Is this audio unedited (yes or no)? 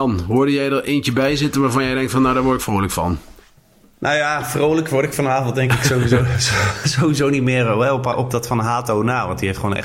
yes